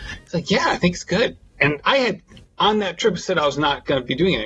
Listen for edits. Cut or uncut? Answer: cut